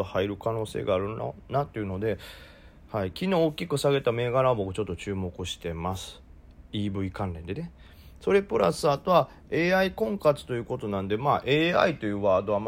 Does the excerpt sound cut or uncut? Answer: uncut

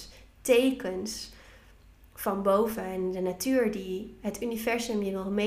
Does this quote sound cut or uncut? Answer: uncut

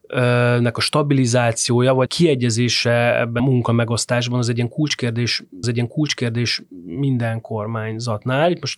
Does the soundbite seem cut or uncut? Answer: cut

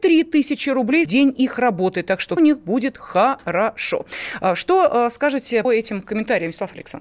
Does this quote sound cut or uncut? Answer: cut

